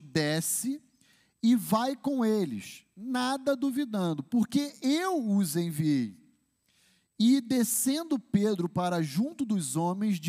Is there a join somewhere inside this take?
no; 0 cuts

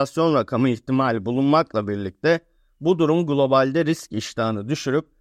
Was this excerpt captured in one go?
yes; 0 cuts

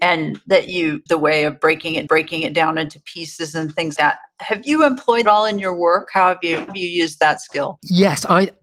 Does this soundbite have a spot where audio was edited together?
yes; 5 cuts; at 1.1 s, 2.1 s, 4.0 s, 5.2 s, 6.7 s

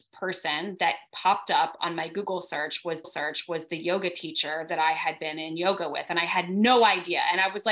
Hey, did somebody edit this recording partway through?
yes; 1 cut; at 3.0 s

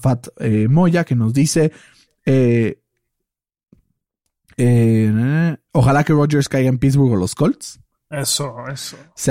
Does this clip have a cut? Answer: no; 0 cuts

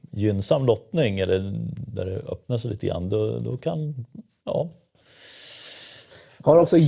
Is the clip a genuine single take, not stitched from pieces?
yes; 0 cuts

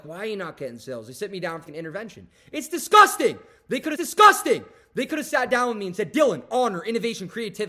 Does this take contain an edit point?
yes; 2 cuts; at 1.6 s, 3.9 s

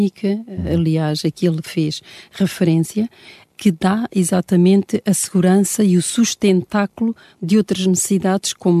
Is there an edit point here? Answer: no; 0 cuts

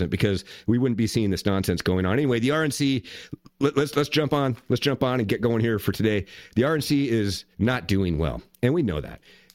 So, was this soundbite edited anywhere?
yes; 1 cut; at 7.5 s

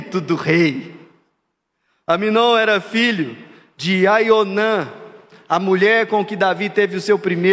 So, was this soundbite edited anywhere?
no; 0 cuts

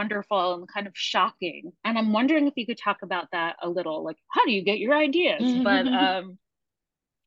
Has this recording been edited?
yes; 1 cut; at 1.8 s

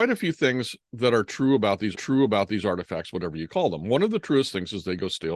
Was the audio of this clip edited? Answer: yes; 1 cut; at 1.9 s

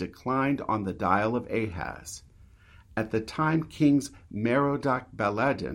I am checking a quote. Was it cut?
no; 0 cuts

